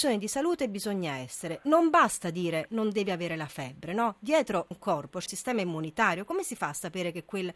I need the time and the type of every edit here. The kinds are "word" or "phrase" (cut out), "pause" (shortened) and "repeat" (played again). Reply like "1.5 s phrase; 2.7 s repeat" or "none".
4.7 s word; 5.3 s word